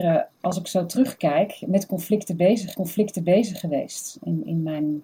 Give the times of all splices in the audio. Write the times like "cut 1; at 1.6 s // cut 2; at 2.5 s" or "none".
cut 1; at 2.7 s